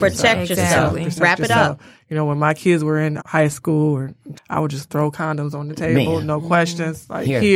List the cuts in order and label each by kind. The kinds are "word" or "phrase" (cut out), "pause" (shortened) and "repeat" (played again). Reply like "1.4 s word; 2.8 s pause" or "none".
3.2 s word; 4.3 s word